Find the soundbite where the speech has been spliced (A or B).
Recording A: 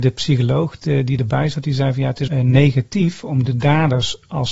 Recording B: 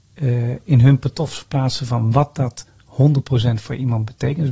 A